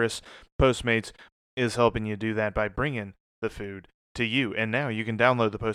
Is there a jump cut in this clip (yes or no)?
no